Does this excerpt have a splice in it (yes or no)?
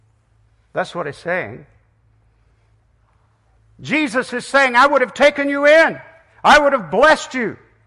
no